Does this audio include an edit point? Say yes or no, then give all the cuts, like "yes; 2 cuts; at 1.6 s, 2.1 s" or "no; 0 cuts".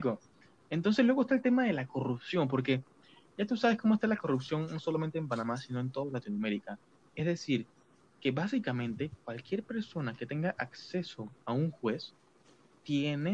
no; 0 cuts